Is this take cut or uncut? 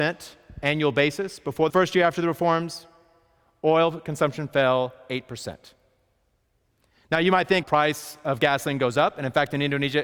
cut